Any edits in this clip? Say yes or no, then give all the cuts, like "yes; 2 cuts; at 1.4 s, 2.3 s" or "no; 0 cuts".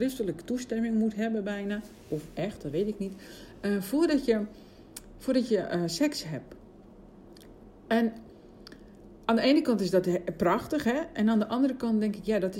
no; 0 cuts